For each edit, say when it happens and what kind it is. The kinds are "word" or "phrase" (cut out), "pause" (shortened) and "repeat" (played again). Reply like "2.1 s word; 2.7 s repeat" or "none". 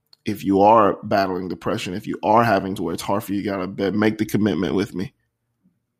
2.8 s word